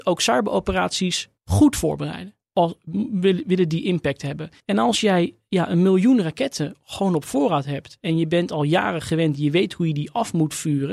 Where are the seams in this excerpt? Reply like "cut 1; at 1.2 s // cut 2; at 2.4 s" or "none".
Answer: cut 1; at 1.4 s // cut 2; at 2.4 s // cut 3; at 4.6 s